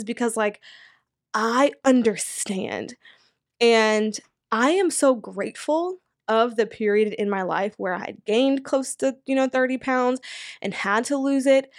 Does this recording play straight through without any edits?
yes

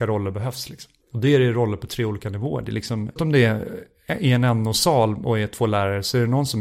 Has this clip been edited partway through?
yes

